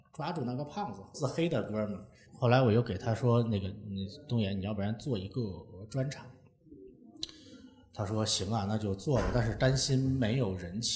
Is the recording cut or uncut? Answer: uncut